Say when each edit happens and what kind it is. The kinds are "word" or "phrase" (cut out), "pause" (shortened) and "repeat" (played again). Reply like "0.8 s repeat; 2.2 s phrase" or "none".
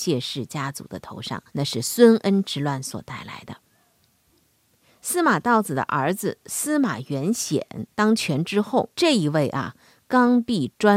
1.5 s pause; 7.9 s pause; 8.9 s pause